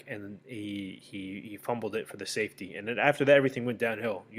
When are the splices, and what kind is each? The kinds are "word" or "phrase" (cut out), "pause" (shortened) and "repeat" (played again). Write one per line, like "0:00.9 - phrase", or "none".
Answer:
none